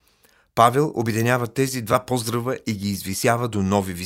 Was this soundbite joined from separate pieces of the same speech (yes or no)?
no